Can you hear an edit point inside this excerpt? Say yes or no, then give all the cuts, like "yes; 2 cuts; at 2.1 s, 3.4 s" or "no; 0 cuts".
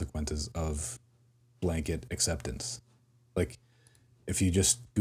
no; 0 cuts